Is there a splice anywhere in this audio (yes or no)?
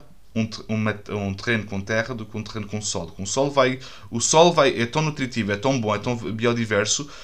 no